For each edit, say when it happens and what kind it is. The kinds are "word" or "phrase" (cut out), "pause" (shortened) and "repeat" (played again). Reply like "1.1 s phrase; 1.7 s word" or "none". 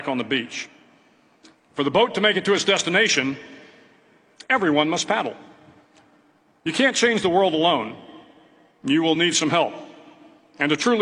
none